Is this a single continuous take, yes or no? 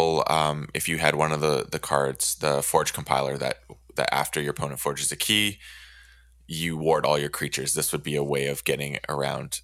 yes